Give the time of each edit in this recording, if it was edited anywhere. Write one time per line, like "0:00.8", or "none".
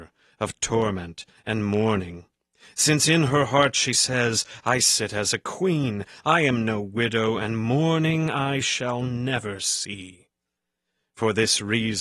none